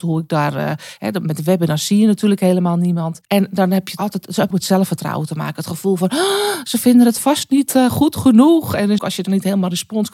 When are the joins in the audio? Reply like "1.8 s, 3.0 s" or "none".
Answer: 3.2 s, 4.0 s, 4.5 s, 9.0 s